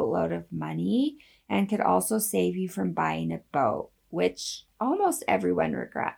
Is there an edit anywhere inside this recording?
no; 0 cuts

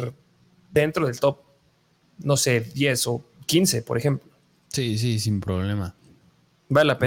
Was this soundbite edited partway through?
no; 0 cuts

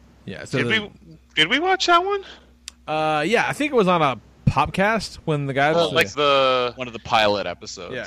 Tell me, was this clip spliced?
yes; 2 cuts; at 5.7 s, 6.1 s

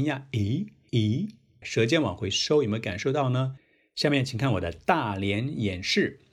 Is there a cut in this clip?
no; 0 cuts

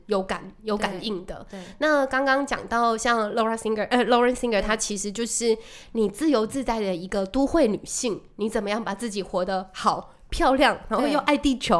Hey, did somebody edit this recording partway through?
no; 0 cuts

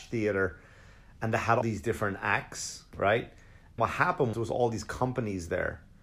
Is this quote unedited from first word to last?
no; 3 cuts; at 1.6 s, 3.8 s, 4.3 s

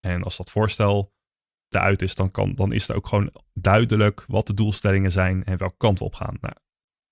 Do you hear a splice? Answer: no; 0 cuts

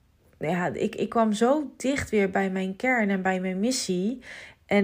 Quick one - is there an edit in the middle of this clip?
no; 0 cuts

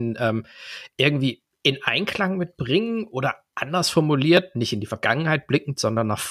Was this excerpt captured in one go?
yes; 0 cuts

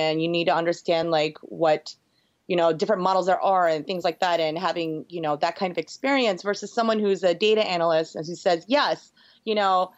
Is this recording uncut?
yes; 0 cuts

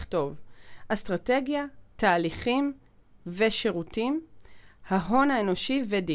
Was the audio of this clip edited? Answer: no; 0 cuts

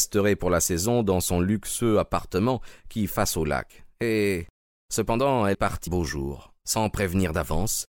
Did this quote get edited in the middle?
yes; 3 cuts; at 3.1 s, 5.5 s, 5.9 s

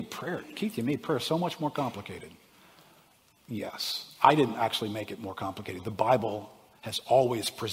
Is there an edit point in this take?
no; 0 cuts

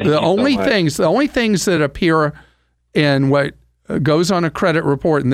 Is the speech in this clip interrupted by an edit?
no; 0 cuts

